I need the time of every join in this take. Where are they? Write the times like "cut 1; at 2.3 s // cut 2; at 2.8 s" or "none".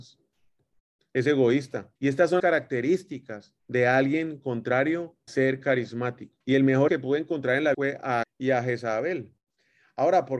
cut 1; at 2.0 s // cut 2; at 2.4 s // cut 3; at 3.6 s // cut 4; at 5.3 s // cut 5; at 6.4 s // cut 6; at 6.9 s // cut 7; at 7.7 s // cut 8; at 8.2 s